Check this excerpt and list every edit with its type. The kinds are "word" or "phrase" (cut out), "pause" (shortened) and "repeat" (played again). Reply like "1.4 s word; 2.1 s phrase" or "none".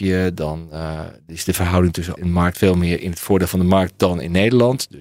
2.2 s word; 2.5 s word